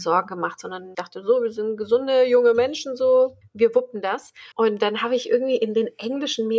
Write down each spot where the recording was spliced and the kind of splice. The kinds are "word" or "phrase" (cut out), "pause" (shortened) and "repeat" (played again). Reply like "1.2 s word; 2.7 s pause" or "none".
0.9 s word; 3.4 s pause; 4.5 s pause